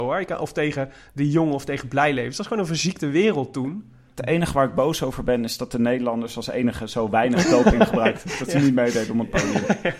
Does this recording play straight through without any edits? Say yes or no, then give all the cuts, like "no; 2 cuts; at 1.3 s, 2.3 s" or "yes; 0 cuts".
yes; 0 cuts